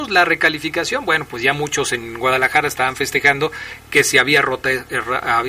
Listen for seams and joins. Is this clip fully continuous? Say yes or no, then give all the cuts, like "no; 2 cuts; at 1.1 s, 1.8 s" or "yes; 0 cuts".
yes; 0 cuts